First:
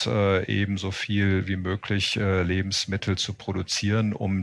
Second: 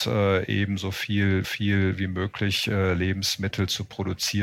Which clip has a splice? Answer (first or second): second